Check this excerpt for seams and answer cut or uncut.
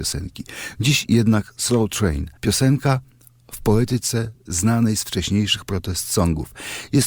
cut